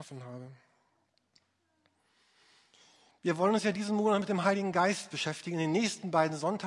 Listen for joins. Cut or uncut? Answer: uncut